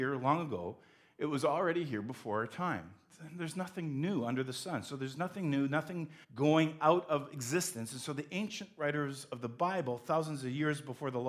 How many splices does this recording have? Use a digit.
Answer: 1